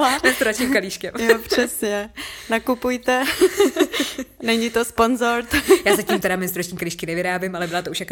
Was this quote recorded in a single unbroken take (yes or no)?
yes